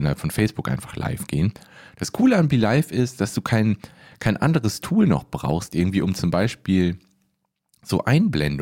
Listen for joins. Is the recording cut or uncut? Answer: uncut